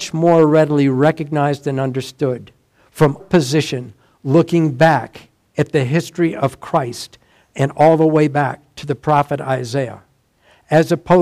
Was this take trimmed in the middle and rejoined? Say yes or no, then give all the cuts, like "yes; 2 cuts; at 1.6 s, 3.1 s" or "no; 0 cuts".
yes; 1 cut; at 3.2 s